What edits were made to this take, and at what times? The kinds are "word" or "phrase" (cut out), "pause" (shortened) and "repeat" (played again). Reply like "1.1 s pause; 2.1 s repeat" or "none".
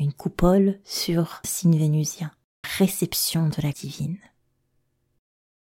1.4 s word; 2.6 s word; 3.7 s word

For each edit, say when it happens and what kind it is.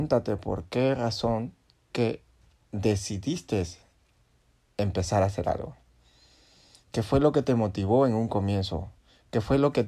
1.9 s word

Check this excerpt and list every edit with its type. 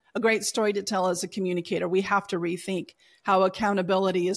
none

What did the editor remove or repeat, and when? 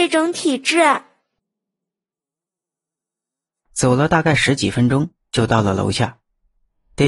none

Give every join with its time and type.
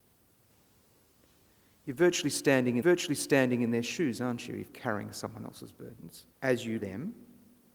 2.8 s repeat; 4.7 s word; 6.3 s pause; 6.8 s phrase

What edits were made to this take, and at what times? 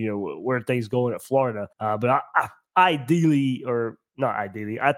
1.7 s pause

